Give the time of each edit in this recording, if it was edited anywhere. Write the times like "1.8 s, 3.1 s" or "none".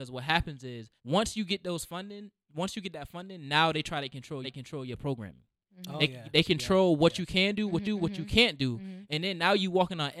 1.0 s, 4.4 s, 7.8 s